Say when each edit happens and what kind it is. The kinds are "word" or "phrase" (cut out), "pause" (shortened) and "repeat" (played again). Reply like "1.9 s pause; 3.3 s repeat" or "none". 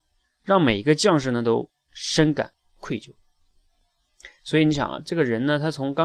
none